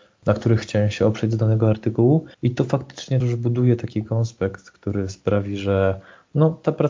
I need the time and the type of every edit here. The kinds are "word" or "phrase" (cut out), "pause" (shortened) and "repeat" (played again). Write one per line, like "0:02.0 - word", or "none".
0:02.3 - pause
0:03.2 - word

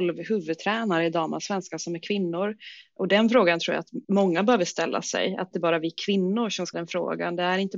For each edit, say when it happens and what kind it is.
0:04.0 - pause
0:05.5 - phrase
0:06.7 - word

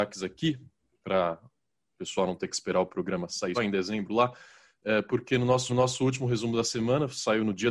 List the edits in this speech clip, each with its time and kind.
0:03.5 - word
0:05.7 - repeat

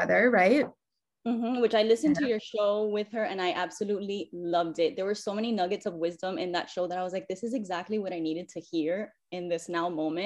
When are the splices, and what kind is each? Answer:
none

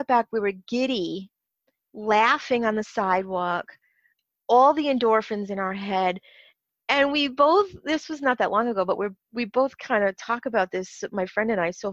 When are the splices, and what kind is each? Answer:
none

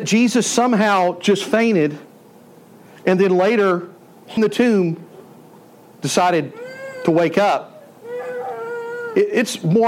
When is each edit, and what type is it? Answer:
0:04.4 - word

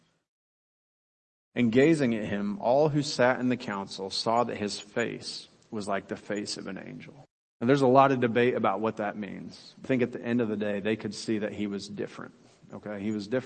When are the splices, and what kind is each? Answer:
0:07.2 - pause
0:09.8 - word

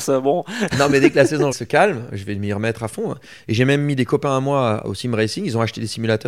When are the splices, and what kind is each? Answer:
0:01.5 - word

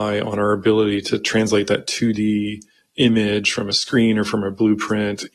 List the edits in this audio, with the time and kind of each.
none

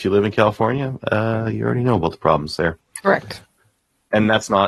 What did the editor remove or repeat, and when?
none

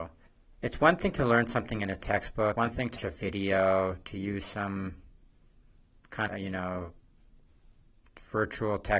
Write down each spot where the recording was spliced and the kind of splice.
0:02.6 - word
0:03.0 - word
0:06.3 - word

